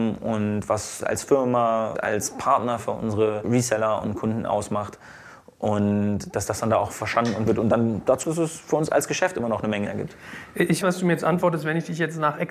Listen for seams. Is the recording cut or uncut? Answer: cut